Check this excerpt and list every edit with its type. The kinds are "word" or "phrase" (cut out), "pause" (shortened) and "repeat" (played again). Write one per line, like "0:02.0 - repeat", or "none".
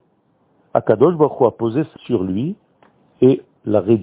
0:02.0 - word